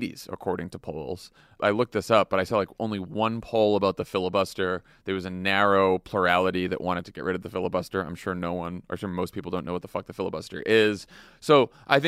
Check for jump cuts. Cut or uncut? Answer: uncut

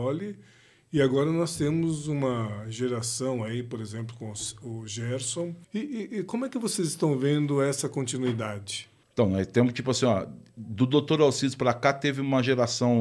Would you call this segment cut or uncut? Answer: cut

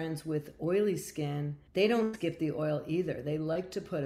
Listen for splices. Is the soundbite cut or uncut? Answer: cut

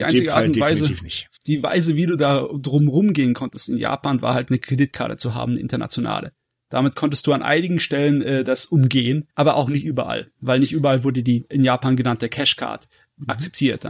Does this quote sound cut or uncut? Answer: cut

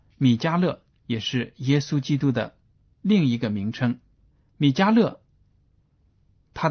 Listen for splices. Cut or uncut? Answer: uncut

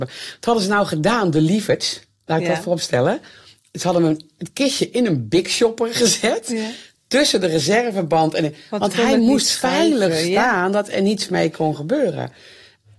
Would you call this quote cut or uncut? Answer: uncut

